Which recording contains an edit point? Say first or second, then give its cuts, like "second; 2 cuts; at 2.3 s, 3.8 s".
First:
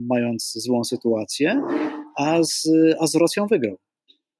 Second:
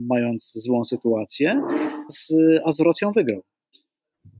second; 1 cut; at 2.1 s